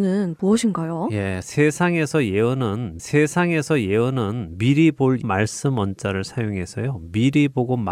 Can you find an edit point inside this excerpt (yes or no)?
yes